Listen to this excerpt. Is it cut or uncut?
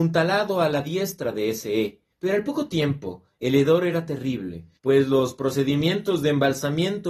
cut